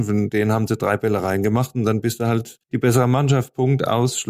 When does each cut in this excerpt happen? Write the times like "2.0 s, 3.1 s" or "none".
2.6 s